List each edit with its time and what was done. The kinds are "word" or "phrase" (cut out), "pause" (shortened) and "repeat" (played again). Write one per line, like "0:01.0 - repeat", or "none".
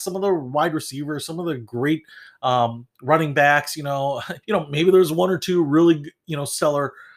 0:04.4 - pause